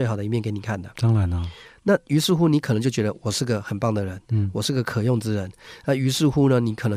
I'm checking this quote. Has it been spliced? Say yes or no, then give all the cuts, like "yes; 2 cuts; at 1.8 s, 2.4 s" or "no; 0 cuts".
no; 0 cuts